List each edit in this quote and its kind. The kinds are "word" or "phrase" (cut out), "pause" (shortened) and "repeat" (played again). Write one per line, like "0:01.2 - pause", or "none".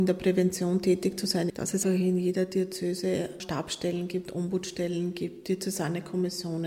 0:01.5 - word
0:01.8 - word